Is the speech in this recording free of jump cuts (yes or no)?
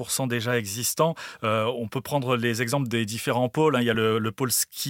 yes